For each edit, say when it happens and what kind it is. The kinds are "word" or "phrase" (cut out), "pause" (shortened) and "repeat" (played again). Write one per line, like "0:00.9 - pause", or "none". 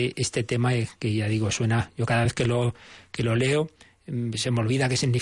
none